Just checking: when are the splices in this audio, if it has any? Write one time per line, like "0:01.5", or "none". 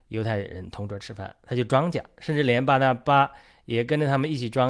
none